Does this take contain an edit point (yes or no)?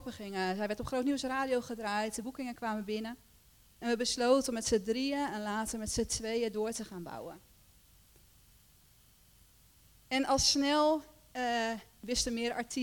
no